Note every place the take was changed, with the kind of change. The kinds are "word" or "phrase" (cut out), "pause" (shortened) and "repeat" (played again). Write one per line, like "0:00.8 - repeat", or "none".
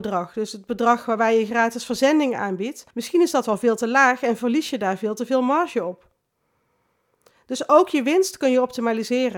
0:02.9 - pause